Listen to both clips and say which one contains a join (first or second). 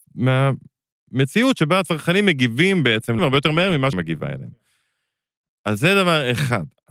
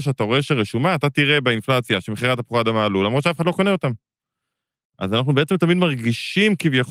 first